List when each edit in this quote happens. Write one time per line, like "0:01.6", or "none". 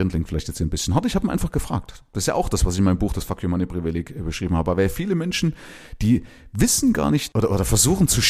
none